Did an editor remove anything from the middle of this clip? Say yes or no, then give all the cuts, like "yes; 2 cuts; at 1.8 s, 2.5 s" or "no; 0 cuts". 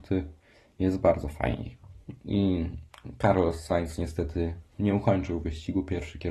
yes; 1 cut; at 4.7 s